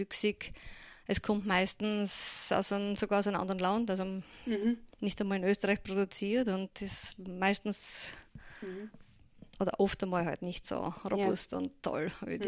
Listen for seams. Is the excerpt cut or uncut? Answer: cut